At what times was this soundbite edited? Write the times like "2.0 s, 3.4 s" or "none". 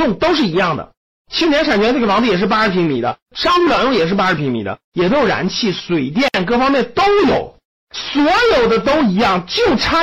none